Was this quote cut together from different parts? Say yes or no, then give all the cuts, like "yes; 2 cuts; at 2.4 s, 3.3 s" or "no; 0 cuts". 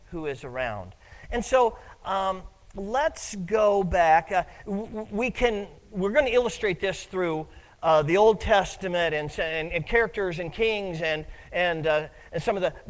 no; 0 cuts